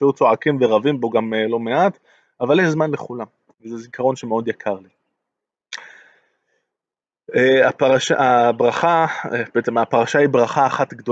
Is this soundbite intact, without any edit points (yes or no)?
yes